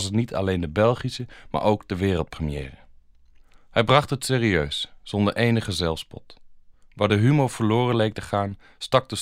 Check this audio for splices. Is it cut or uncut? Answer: uncut